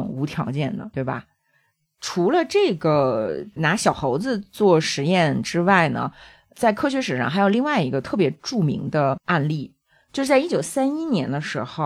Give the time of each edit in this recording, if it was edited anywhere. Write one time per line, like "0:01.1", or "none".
0:00.9